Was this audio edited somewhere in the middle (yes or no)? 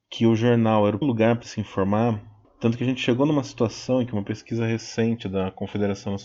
yes